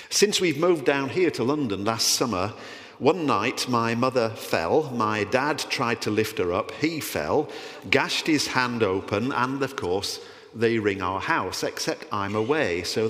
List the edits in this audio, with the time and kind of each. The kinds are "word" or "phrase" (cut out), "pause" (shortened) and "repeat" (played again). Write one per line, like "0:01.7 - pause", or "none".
none